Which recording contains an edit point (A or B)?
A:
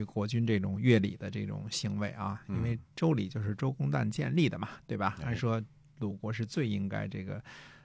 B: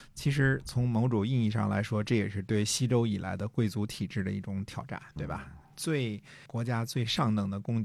B